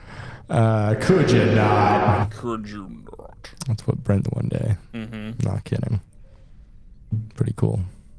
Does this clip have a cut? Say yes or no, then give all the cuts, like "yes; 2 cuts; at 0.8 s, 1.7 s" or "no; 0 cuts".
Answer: yes; 1 cut; at 4.3 s